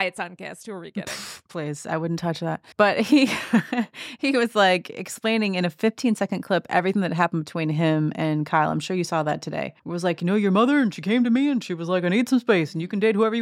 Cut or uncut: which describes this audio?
cut